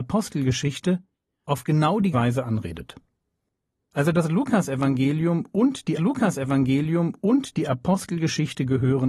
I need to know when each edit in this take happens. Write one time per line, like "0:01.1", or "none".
0:02.1
0:06.0